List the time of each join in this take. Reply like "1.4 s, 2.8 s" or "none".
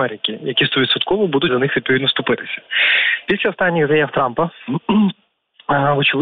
1.5 s